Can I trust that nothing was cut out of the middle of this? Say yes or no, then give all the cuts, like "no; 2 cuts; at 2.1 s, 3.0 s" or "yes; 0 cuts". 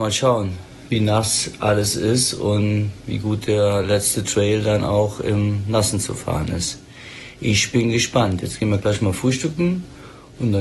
yes; 0 cuts